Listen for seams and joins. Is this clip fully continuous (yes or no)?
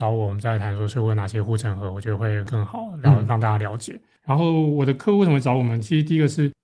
no